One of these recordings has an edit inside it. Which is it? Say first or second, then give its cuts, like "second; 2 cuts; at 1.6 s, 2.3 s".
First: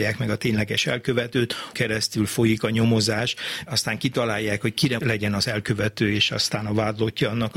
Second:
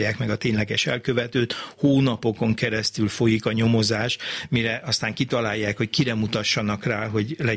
first; 3 cuts; at 1.7 s, 3.7 s, 5.0 s